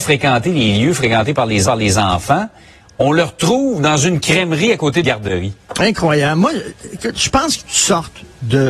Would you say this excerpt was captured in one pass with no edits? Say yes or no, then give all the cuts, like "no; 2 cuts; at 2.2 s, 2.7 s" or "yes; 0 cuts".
no; 3 cuts; at 1.6 s, 5.0 s, 7.6 s